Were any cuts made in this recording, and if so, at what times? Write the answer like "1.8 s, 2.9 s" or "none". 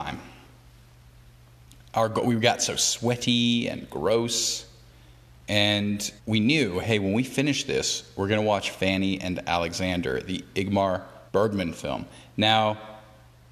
6.2 s, 11.3 s